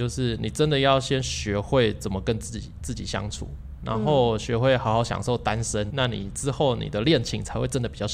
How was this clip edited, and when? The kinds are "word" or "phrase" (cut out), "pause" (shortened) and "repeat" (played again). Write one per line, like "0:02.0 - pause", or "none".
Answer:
0:05.9 - word